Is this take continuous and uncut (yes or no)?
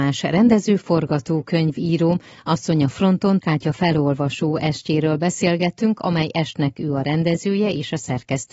no